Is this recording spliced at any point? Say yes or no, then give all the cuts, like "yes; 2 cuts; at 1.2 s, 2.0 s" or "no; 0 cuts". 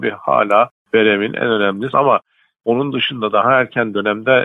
yes; 1 cut; at 1.9 s